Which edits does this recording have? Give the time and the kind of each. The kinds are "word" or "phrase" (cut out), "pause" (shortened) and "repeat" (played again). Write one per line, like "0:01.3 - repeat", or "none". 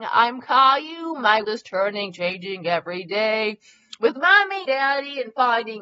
0:01.4 - word
0:04.7 - word